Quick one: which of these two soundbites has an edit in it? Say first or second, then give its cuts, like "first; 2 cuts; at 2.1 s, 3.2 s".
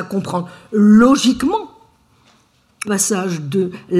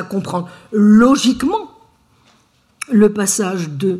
first; 1 cut; at 2.8 s